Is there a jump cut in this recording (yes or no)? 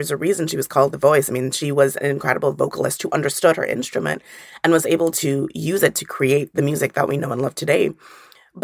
no